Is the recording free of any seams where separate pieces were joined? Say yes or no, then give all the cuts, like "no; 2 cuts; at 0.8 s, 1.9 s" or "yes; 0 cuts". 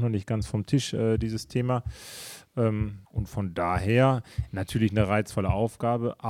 no; 1 cut; at 3.1 s